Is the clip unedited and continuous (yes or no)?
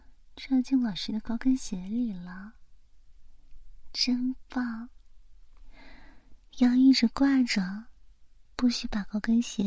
no